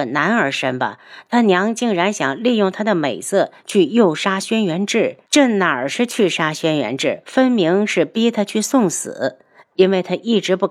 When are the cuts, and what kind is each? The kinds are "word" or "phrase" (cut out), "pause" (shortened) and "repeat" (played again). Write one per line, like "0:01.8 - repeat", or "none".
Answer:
0:05.3 - pause